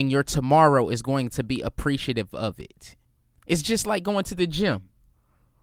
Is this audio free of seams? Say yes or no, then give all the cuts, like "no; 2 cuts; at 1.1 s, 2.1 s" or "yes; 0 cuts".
no; 1 cut; at 3.0 s